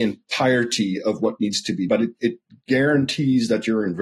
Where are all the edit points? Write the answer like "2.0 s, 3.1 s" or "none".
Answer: 1.9 s